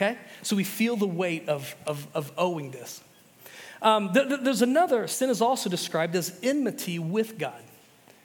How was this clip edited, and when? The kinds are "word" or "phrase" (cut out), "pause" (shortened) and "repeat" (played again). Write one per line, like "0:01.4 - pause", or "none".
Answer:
none